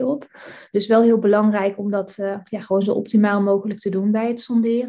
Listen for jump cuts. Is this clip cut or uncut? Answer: uncut